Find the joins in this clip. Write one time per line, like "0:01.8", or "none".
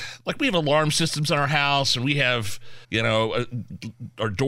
0:02.8